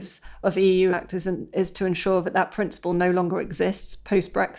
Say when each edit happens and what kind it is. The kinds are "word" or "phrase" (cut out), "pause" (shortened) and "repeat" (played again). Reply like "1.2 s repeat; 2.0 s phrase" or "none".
0.9 s word